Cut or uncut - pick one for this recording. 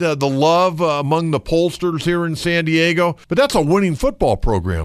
cut